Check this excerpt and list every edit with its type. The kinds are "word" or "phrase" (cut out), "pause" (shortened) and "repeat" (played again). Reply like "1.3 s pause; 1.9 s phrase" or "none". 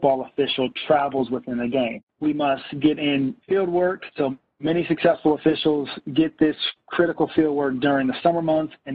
2.1 s pause; 3.4 s pause; 4.1 s pause